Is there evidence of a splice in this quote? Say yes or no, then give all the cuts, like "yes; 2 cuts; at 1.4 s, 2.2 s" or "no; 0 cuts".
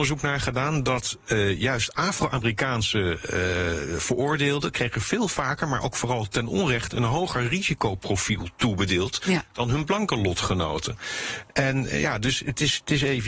no; 0 cuts